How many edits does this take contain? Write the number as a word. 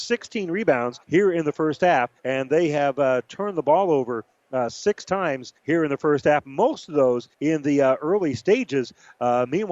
four